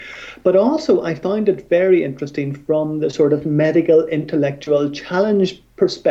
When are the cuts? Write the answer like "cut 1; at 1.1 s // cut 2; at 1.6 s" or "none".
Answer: none